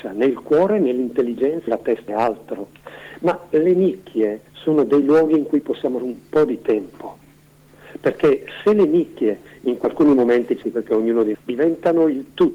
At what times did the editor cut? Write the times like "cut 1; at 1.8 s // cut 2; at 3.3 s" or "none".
cut 1; at 1.7 s // cut 2; at 2.1 s // cut 3; at 4.5 s // cut 4; at 6.0 s // cut 5; at 9.8 s // cut 6; at 10.6 s // cut 7; at 11.3 s